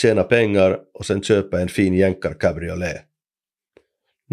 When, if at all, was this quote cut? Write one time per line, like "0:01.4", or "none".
none